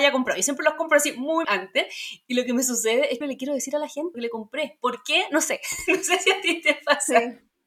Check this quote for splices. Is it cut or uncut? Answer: cut